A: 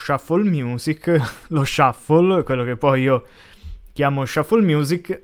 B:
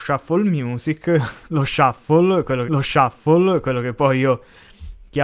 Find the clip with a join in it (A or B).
B